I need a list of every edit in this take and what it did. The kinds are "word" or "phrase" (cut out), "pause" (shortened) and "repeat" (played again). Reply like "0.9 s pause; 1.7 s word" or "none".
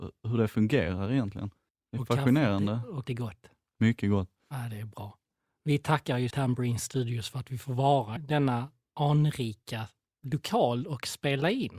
3.0 s word; 4.4 s pause; 6.3 s word; 8.2 s word